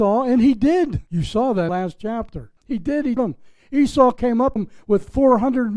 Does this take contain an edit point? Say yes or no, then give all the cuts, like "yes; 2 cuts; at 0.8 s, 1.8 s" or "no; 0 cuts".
yes; 5 cuts; at 1.1 s, 1.7 s, 2.6 s, 3.2 s, 4.6 s